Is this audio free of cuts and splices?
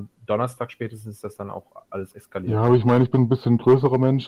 no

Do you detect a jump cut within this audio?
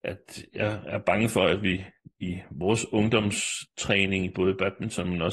no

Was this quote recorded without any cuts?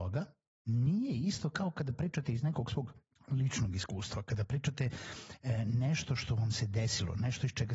no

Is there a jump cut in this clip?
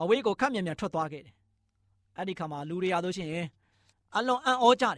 no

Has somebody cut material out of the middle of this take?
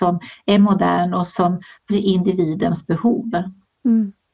yes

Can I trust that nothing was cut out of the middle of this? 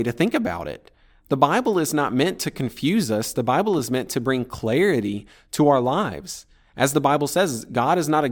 yes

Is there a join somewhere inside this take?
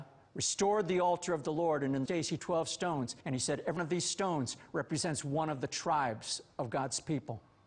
yes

